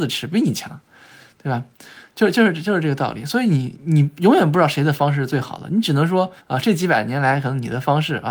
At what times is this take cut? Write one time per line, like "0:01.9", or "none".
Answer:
0:06.4